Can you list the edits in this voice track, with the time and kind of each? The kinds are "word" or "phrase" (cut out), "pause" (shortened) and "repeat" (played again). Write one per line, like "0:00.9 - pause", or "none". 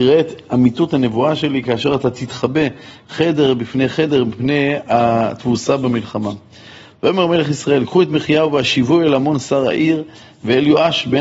none